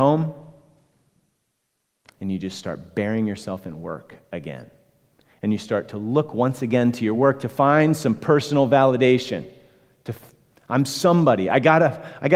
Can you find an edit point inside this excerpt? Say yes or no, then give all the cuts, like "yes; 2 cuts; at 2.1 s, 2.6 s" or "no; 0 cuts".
no; 0 cuts